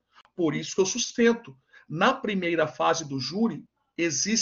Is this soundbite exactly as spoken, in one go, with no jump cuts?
yes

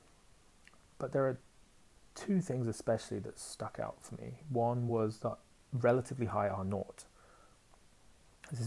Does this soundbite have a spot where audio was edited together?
no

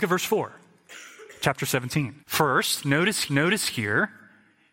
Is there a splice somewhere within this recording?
yes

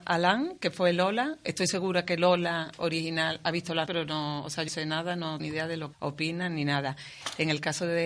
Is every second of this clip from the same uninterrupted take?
no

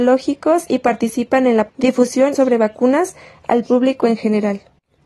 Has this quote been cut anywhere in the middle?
yes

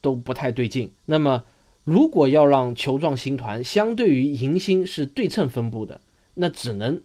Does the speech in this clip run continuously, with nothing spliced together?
no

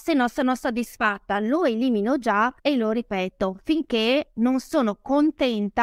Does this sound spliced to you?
yes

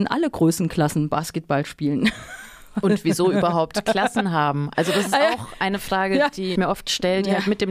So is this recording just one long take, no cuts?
no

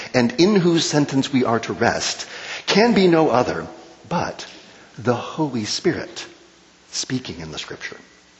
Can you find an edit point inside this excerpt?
no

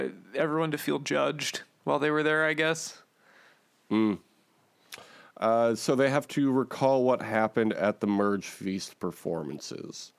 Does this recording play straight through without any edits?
yes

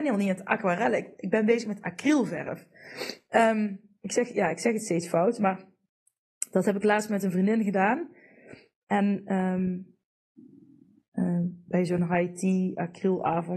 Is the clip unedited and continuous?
yes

